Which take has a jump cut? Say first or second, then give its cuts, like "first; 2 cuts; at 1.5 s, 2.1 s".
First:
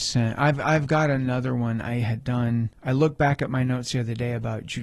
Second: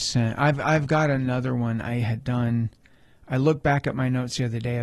first; 1 cut; at 2.7 s